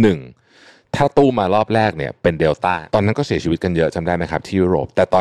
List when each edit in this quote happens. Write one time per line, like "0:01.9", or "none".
0:02.9